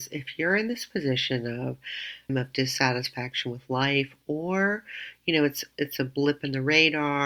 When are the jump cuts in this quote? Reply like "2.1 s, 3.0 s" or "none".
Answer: 2.3 s